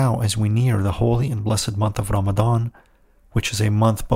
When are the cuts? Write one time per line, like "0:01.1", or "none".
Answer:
none